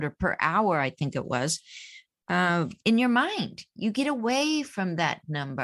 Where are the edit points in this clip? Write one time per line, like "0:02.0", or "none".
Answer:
0:02.8